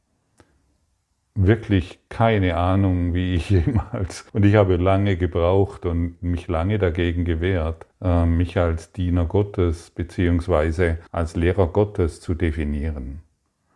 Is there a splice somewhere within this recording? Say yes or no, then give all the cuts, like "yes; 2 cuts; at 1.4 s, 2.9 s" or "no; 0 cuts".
yes; 3 cuts; at 4.3 s, 7.9 s, 11.1 s